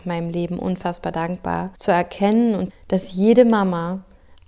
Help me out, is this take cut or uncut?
cut